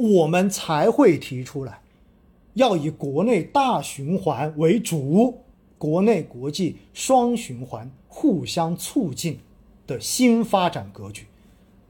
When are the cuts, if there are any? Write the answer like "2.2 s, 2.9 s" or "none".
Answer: none

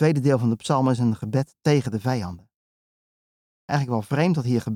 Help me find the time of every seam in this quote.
none

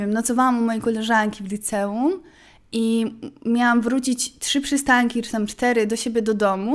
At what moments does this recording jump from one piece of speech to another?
none

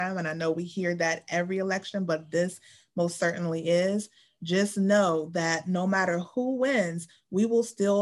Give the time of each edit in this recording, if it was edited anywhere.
none

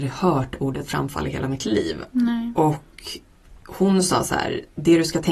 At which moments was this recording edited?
3.6 s

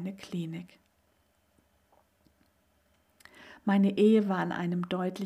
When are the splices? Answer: none

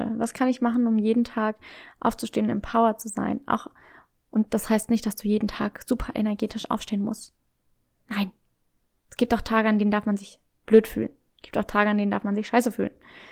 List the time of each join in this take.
none

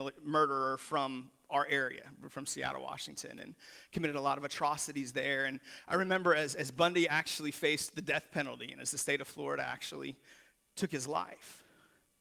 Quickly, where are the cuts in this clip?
none

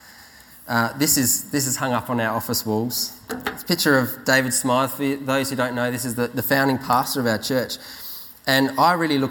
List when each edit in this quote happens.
none

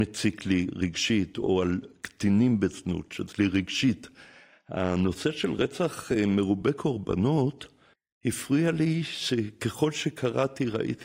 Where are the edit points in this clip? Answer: 3.3 s, 7.9 s

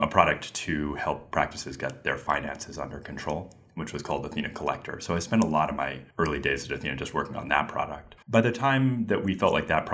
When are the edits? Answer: 6.1 s, 8.2 s

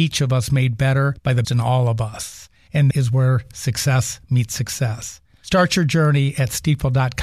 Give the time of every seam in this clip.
1.4 s, 2.9 s

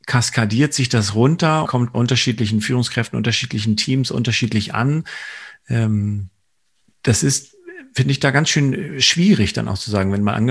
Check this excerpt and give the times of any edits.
1.6 s, 1.9 s, 6.8 s

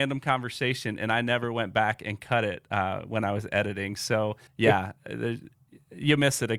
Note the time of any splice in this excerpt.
4.5 s

